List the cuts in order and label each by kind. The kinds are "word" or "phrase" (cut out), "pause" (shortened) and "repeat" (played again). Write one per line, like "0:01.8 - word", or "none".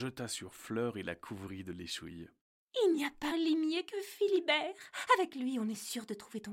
0:03.3 - word